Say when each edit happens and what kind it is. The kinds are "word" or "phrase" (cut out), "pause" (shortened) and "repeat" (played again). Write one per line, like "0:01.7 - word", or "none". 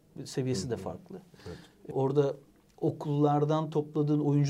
0:01.9 - word